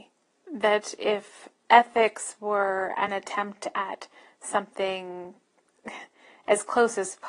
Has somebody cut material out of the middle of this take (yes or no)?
no